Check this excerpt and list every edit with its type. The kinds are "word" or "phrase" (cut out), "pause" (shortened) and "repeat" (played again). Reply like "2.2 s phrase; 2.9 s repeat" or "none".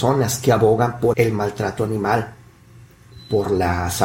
1.1 s word